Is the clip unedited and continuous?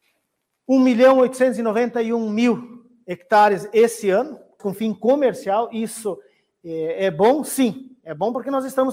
no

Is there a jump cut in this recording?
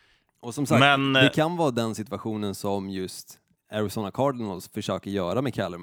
yes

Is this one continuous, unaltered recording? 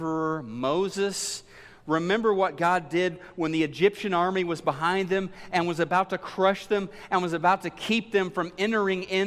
yes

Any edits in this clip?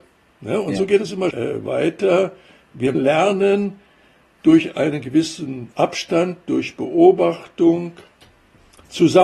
yes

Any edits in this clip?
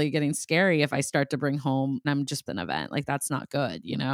yes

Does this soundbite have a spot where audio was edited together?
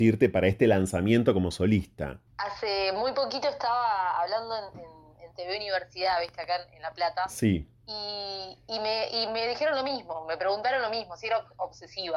yes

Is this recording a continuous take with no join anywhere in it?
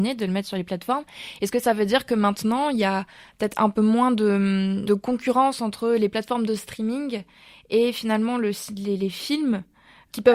no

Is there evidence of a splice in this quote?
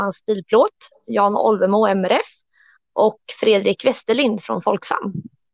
no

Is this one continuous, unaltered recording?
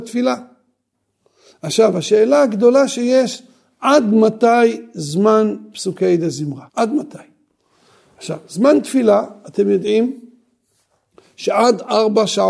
no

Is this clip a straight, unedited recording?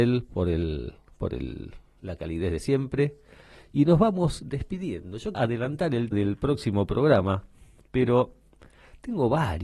no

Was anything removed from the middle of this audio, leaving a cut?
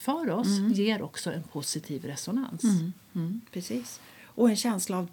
no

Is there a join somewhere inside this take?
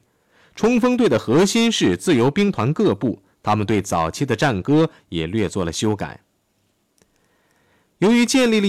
no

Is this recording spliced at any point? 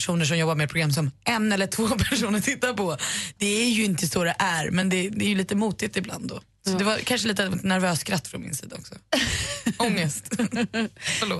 no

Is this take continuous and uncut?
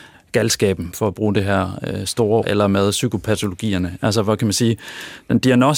no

